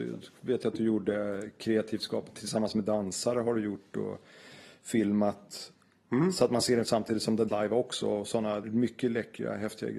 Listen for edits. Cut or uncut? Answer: cut